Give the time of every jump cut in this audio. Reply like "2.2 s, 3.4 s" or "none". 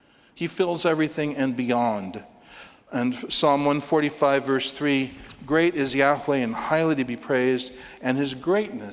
none